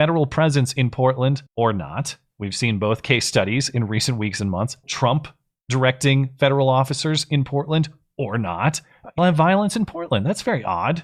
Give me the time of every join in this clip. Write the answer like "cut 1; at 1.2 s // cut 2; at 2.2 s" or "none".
cut 1; at 1.5 s // cut 2; at 4.8 s // cut 3; at 9.2 s